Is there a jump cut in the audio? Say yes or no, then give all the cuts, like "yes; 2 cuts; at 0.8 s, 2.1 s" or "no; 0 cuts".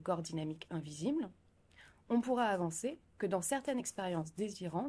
no; 0 cuts